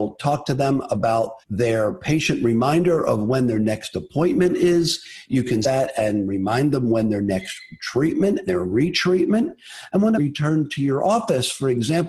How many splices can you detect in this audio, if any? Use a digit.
4